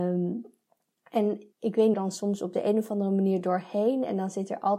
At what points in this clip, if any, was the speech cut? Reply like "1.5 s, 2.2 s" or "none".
1.5 s, 1.9 s